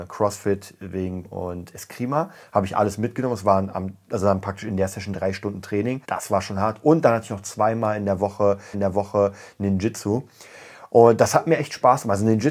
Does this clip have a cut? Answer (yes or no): yes